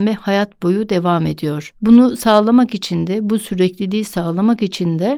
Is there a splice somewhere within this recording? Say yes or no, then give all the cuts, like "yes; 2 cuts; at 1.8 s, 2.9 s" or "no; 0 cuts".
no; 0 cuts